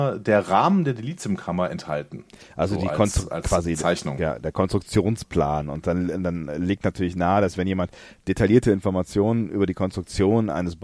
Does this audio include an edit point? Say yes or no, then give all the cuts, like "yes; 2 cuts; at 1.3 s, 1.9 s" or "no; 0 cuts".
no; 0 cuts